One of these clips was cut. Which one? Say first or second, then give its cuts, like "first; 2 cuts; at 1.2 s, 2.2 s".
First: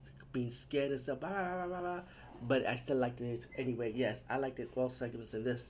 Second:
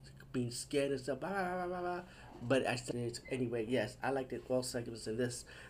second; 1 cut; at 2.9 s